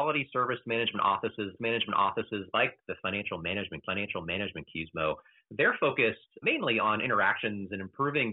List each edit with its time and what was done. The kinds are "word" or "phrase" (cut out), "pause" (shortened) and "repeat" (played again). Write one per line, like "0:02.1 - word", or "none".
0:01.6 - repeat
0:03.9 - repeat
0:06.4 - word